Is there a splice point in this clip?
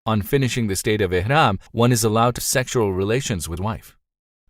yes; 3 cuts; at 1.7 s, 2.4 s, 3.6 s

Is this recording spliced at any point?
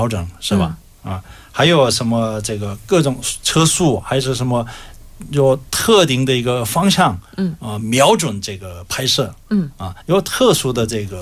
yes; 1 cut; at 10.0 s

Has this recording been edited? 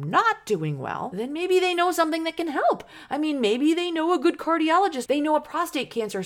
yes; 2 cuts; at 1.1 s, 5.1 s

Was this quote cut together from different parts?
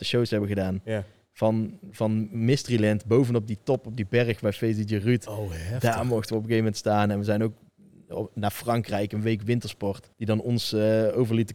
yes; 1 cut; at 10.1 s

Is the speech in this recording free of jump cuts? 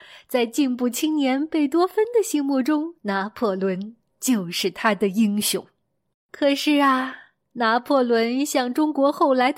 no; 2 cuts; at 3.0 s, 6.1 s

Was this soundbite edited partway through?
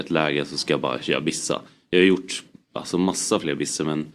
no; 0 cuts

